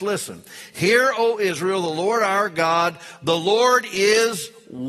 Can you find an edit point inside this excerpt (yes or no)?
no